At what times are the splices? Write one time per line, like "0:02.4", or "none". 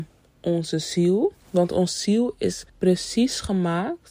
0:02.7

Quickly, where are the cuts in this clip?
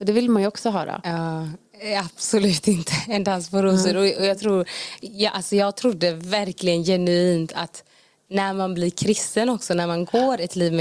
none

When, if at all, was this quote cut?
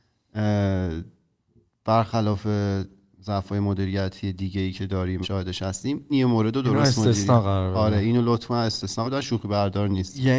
0:05.2
0:06.1
0:09.0

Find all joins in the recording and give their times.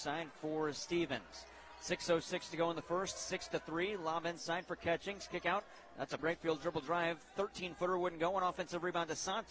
0:05.4
0:06.2

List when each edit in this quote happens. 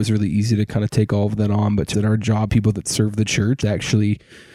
0:01.9
0:02.5
0:03.6

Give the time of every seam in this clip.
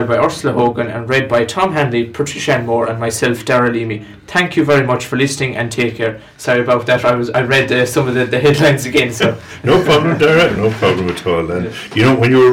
none

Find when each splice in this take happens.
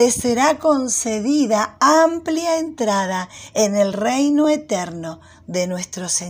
none

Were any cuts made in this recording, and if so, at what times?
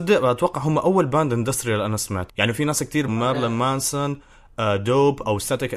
0:02.3
0:03.1

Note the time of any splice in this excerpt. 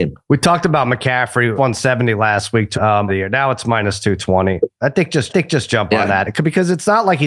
0:01.6
0:02.7
0:03.1
0:05.3

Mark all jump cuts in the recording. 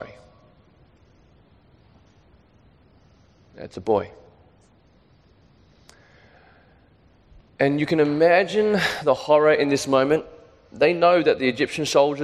none

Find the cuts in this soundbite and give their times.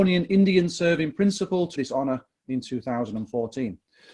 0:01.8

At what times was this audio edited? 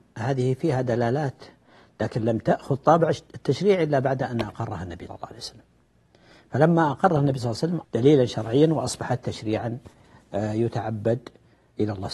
0:05.1
0:07.8

